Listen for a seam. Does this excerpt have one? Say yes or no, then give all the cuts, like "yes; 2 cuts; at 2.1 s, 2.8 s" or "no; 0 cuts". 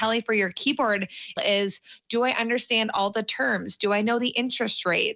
yes; 1 cut; at 1.4 s